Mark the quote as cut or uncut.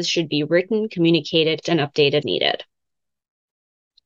cut